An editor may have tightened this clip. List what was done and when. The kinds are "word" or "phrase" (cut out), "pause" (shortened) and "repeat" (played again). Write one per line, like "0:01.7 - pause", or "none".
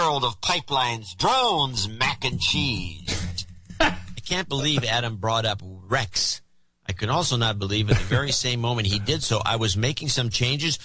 none